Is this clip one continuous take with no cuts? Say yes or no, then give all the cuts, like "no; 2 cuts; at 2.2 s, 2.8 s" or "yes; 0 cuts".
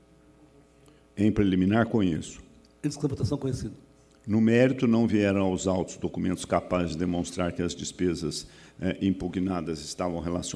yes; 0 cuts